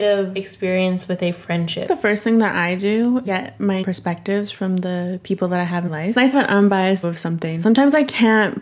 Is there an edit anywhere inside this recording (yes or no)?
yes